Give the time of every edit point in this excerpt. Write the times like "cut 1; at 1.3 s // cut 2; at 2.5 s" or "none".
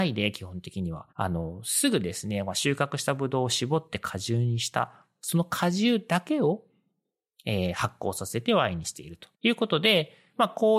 cut 1; at 1.1 s // cut 2; at 9.3 s